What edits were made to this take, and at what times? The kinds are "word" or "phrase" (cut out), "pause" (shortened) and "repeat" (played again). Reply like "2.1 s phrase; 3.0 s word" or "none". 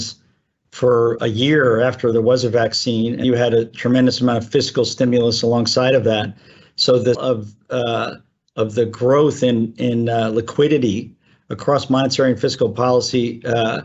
1.2 s word; 3.2 s word; 7.1 s word